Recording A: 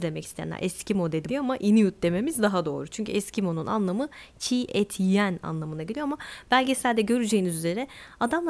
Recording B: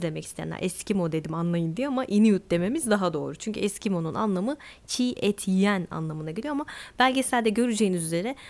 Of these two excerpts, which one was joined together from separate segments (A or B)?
A